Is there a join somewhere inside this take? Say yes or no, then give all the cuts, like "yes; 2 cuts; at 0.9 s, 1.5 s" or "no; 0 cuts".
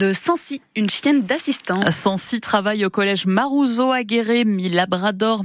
no; 0 cuts